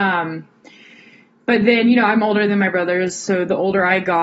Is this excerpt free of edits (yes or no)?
yes